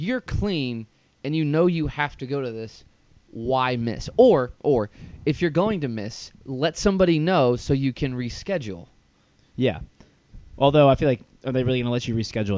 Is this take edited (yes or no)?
yes